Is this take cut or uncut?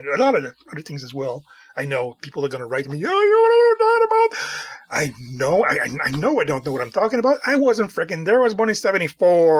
uncut